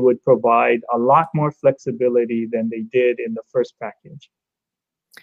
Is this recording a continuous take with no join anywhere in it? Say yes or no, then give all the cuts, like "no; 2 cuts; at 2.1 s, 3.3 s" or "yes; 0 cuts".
yes; 0 cuts